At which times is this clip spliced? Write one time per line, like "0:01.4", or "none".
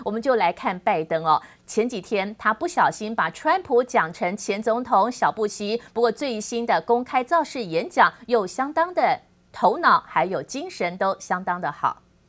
none